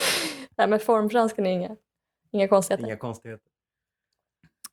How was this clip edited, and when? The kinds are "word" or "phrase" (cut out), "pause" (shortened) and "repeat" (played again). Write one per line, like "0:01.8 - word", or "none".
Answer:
none